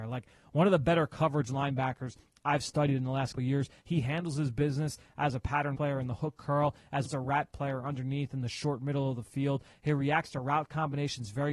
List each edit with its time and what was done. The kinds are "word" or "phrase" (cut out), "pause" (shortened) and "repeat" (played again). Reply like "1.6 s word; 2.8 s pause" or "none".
3.3 s word; 5.7 s word; 7.0 s word